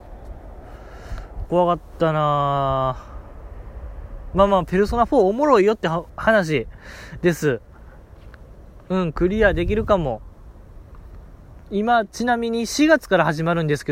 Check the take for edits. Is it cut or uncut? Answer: cut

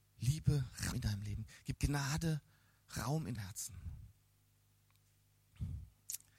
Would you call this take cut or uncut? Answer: cut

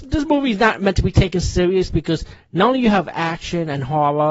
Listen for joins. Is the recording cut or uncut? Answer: uncut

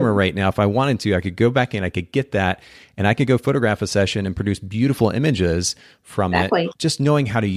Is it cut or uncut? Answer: uncut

